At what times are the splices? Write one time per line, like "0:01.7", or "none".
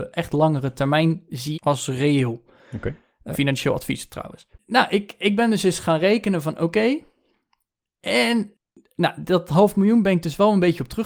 0:01.5
0:03.3
0:04.5